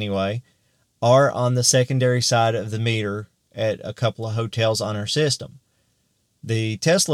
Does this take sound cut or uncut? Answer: uncut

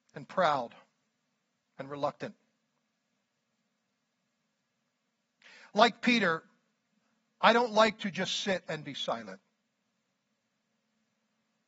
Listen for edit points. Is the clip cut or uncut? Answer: uncut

